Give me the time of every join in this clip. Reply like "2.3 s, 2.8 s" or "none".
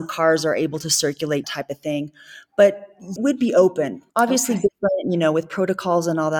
1.4 s, 3.2 s, 4.1 s